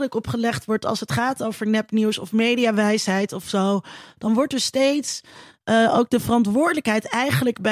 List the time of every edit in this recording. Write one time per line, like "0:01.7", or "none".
none